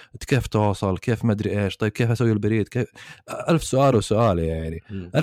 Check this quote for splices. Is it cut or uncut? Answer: uncut